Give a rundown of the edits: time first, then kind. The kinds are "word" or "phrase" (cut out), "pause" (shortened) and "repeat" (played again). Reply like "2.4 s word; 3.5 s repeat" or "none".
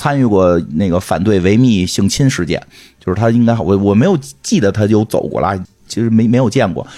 none